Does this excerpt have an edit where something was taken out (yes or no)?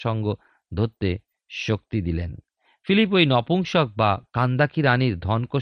no